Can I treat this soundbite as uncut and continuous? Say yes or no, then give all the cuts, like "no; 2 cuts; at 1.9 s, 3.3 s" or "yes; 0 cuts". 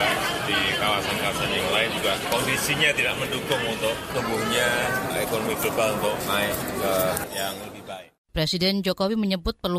yes; 0 cuts